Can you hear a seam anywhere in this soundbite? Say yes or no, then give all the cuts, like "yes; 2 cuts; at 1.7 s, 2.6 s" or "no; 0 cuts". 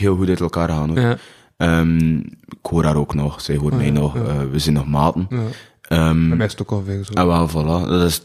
no; 0 cuts